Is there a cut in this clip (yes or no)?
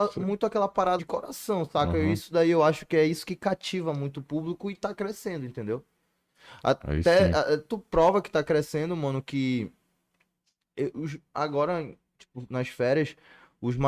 yes